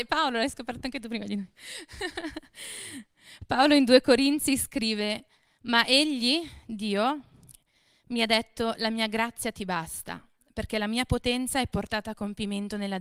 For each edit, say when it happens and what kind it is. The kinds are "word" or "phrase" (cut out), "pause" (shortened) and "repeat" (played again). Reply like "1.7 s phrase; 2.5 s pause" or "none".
none